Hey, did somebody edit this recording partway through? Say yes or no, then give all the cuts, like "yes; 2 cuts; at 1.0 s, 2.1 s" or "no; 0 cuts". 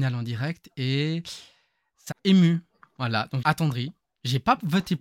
yes; 2 cuts; at 2.1 s, 3.4 s